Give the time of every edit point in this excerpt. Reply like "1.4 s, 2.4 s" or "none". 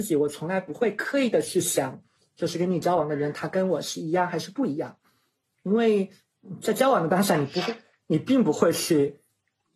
none